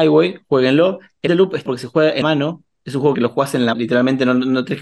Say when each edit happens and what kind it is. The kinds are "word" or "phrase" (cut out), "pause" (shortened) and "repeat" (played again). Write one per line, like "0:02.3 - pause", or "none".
0:01.3 - word
0:01.7 - word
0:02.2 - word
0:03.1 - word
0:03.7 - word